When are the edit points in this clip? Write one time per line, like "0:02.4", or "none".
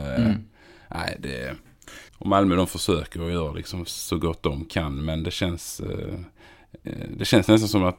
0:02.1